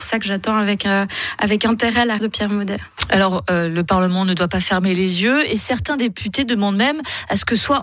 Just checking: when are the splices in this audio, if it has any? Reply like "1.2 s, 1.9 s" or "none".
2.2 s